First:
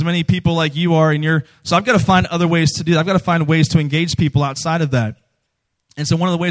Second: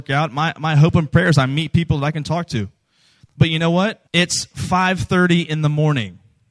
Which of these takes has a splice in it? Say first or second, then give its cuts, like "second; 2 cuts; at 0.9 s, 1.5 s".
second; 1 cut; at 4.1 s